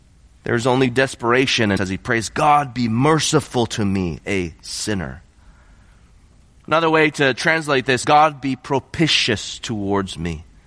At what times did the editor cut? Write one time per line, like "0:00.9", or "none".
0:01.8
0:08.0